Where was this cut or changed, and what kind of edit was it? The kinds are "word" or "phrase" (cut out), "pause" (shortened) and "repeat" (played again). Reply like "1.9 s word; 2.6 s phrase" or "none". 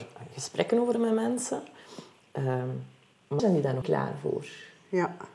0.9 s word; 3.4 s word; 3.8 s word

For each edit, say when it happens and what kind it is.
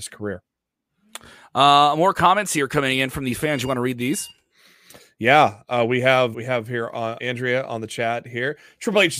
6.3 s word; 7.2 s word

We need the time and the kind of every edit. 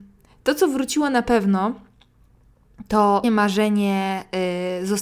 3.2 s word

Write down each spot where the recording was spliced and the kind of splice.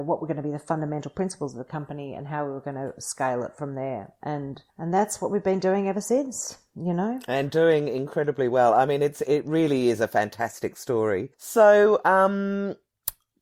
4.7 s pause; 11.3 s pause

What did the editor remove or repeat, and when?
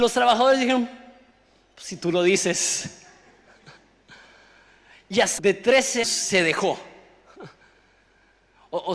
5.4 s phrase; 6.0 s word

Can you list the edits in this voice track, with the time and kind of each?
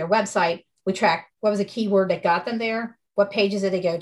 1.3 s pause; 3.1 s pause

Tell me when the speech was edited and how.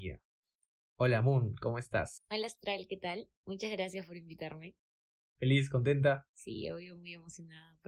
none

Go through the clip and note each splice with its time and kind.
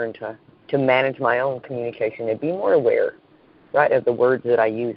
none

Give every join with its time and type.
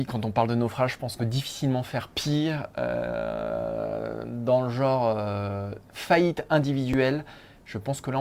1.2 s word

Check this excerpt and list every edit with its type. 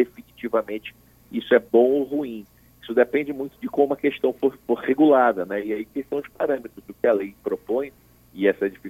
none

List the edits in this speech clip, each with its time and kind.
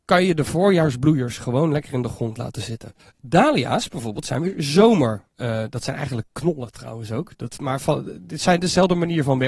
3.0 s pause; 5.3 s pause

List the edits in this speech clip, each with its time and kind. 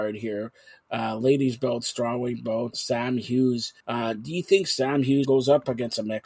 2.7 s word; 3.8 s pause; 5.2 s word

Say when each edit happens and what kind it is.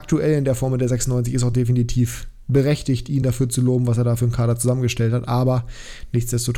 none

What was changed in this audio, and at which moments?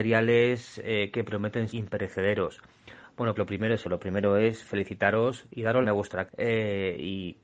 1.7 s word; 3.4 s word; 3.8 s word; 5.8 s phrase; 6.3 s word

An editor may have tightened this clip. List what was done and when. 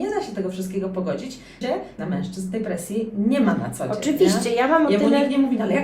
1.6 s word; 2.0 s word

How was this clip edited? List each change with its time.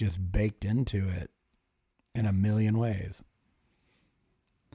none

